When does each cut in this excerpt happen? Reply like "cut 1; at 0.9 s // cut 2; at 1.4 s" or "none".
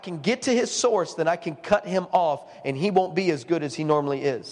none